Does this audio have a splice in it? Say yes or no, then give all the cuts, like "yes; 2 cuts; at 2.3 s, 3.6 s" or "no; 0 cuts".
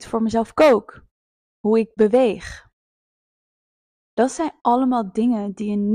no; 0 cuts